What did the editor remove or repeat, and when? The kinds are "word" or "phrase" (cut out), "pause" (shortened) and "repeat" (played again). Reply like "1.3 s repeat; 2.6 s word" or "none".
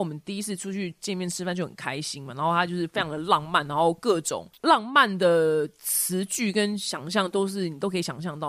none